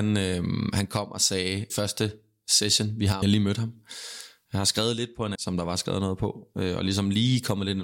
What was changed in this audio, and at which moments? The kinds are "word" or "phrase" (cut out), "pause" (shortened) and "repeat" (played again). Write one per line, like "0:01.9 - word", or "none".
0:01.7 - phrase
0:03.2 - phrase
0:05.3 - phrase